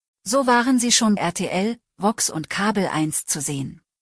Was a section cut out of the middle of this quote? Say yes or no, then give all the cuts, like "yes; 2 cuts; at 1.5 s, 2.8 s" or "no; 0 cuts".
yes; 1 cut; at 1.2 s